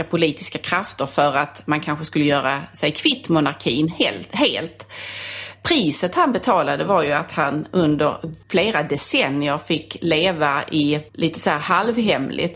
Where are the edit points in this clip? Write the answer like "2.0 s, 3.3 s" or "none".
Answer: 8.4 s, 11.1 s

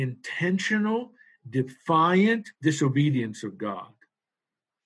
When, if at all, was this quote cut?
2.5 s

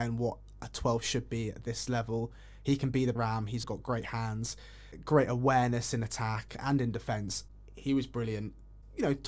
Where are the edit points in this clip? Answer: 3.2 s, 3.6 s

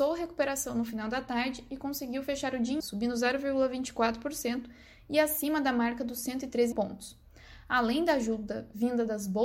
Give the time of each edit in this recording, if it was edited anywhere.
2.8 s, 6.7 s

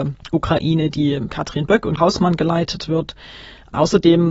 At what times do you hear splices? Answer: 1.3 s, 2.0 s

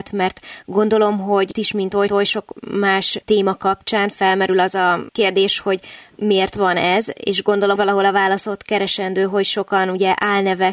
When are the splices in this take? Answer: 1.5 s, 2.1 s, 7.8 s

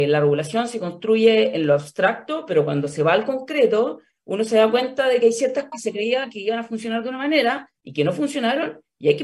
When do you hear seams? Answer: 5.7 s, 7.8 s

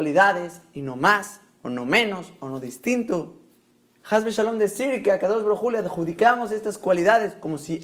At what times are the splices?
none

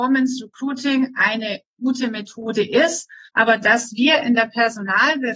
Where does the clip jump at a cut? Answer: 3.3 s

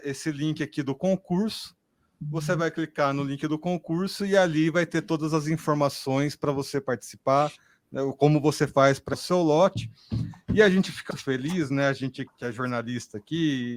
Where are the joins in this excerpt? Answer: 9.1 s, 11.1 s, 12.3 s

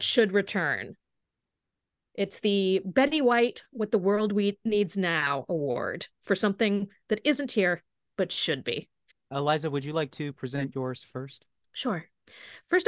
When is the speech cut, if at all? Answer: 9.1 s

